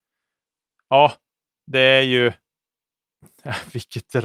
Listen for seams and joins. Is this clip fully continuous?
yes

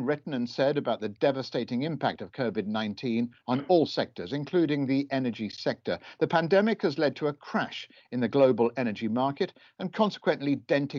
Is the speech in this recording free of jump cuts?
yes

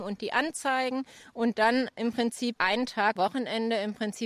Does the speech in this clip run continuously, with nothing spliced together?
no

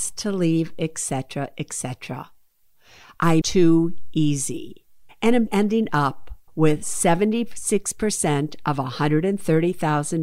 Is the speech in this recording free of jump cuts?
no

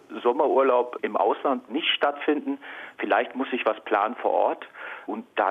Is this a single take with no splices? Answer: no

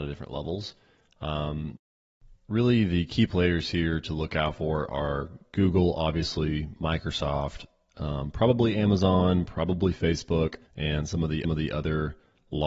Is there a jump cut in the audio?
yes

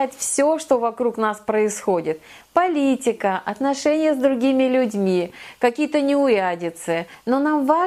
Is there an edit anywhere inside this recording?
no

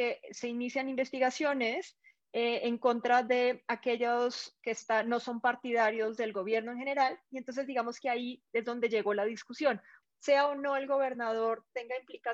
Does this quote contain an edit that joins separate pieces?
yes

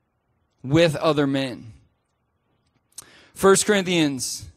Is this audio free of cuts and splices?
yes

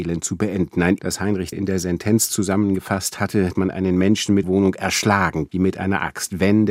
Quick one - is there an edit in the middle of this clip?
yes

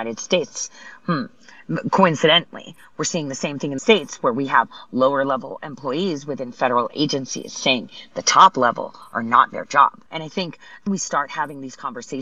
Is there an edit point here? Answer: yes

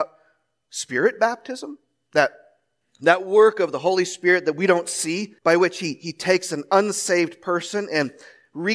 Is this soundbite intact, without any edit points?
no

